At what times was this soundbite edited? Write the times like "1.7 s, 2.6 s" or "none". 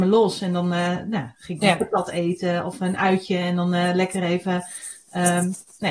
none